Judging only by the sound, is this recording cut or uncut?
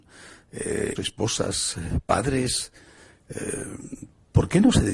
cut